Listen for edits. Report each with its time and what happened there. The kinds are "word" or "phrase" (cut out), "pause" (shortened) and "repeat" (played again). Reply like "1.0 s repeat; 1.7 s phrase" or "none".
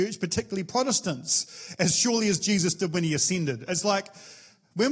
none

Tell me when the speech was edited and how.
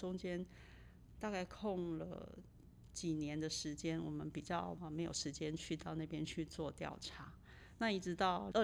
none

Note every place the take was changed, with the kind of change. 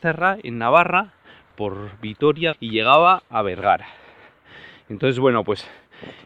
1.5 s word; 2.5 s word

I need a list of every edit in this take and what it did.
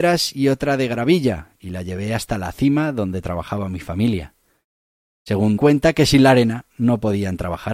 5.6 s phrase

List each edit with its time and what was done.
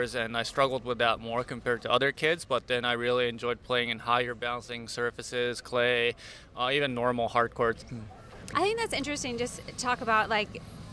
none

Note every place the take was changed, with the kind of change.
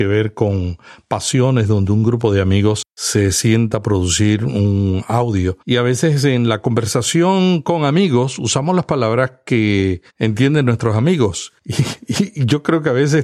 2.9 s pause; 5.6 s pause; 10.1 s pause; 11.6 s pause

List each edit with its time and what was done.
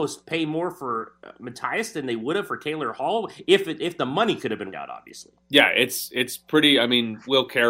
4.7 s word; 5.4 s pause

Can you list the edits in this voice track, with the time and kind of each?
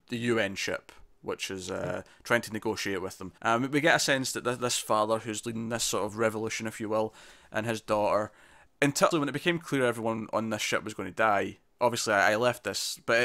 3.4 s pause; 8.7 s word; 9.1 s word

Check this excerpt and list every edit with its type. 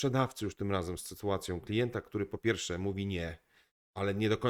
none

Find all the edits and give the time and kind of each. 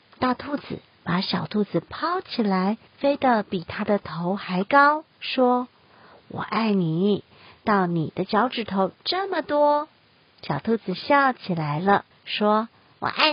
2.9 s pause; 5.1 s pause; 12.1 s pause

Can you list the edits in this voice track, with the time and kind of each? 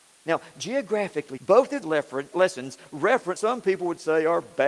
1.4 s word; 1.8 s word; 2.3 s word; 3.4 s word

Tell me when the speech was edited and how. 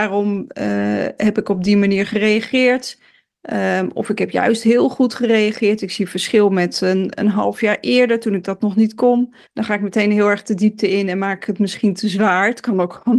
9.4 s pause

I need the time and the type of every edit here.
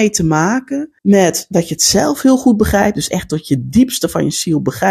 1.0 s pause

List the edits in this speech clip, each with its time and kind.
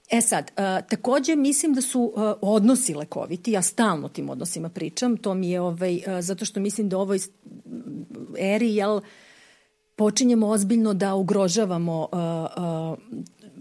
none

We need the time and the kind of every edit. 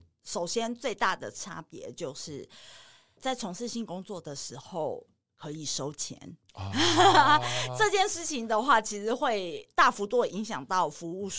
none

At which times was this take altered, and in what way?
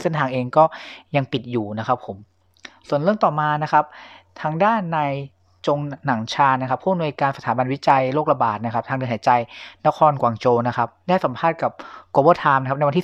none

